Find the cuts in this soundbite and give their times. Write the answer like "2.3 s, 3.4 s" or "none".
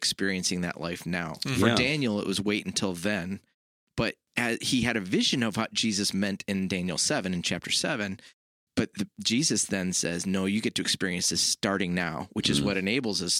none